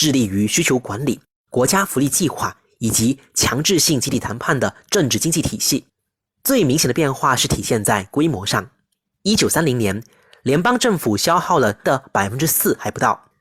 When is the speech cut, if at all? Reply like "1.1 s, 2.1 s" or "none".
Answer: 11.8 s